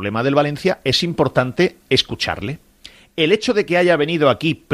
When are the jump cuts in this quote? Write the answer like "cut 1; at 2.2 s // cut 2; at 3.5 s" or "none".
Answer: none